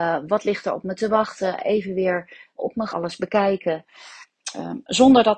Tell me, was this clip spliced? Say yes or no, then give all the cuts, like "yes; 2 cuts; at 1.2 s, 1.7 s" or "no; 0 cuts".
yes; 2 cuts; at 2.6 s, 2.9 s